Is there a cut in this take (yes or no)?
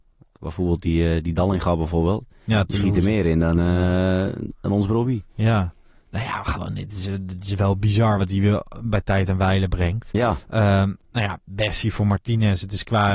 no